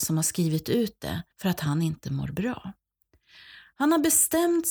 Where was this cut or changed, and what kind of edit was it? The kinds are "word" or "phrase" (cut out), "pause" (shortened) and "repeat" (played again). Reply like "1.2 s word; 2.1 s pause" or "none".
1.3 s pause